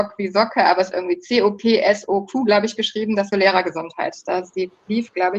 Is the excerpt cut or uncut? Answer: cut